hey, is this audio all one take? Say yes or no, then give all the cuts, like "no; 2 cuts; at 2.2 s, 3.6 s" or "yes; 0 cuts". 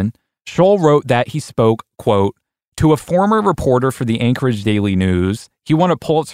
yes; 0 cuts